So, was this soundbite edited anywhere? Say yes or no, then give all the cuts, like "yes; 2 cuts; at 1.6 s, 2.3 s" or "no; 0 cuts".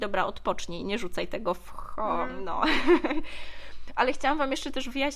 no; 0 cuts